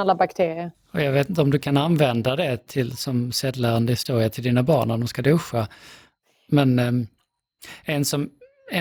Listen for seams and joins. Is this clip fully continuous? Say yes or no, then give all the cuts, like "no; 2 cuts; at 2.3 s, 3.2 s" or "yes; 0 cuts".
yes; 0 cuts